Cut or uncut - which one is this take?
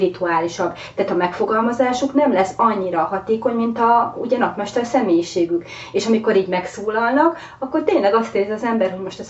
uncut